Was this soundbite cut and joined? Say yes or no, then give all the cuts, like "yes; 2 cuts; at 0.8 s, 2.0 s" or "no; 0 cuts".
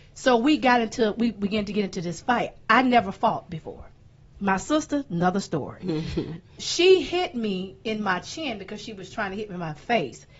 yes; 1 cut; at 6.6 s